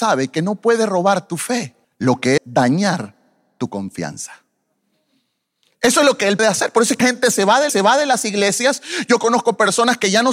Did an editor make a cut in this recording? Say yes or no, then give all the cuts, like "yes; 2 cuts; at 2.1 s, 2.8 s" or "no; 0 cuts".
yes; 5 cuts; at 1.8 s, 2.4 s, 6.4 s, 7.0 s, 7.7 s